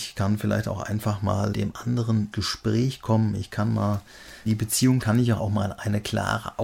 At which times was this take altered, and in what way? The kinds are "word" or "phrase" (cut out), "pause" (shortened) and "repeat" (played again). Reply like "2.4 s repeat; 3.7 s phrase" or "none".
1.5 s word; 2.3 s word; 4.5 s word; 5.0 s word; 5.4 s word